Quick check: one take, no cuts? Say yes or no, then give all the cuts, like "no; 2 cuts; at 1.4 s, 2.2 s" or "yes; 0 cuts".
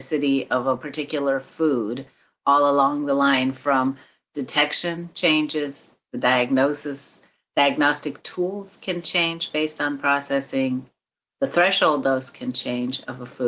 yes; 0 cuts